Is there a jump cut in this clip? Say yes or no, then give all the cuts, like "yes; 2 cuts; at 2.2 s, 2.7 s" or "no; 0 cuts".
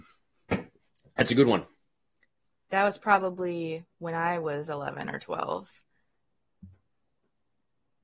no; 0 cuts